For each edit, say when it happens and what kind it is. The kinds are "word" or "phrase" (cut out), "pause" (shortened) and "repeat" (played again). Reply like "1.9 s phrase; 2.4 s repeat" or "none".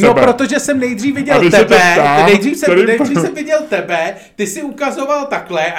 none